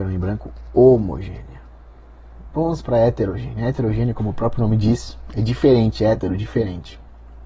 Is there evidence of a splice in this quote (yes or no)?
no